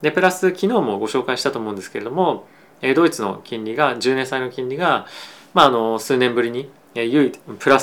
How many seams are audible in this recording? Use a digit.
1